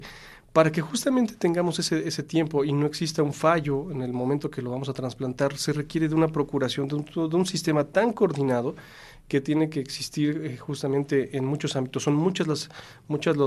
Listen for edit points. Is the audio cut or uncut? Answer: uncut